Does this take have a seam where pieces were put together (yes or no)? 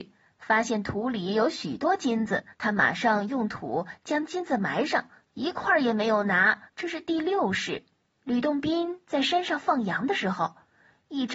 yes